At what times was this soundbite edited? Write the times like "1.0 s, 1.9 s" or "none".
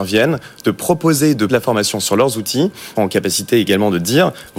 1.5 s, 2.9 s

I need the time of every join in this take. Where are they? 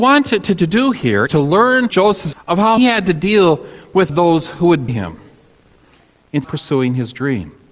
1.3 s, 1.9 s, 2.3 s, 2.8 s, 4.1 s, 4.9 s, 6.4 s

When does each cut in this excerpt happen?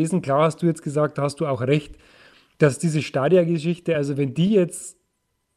none

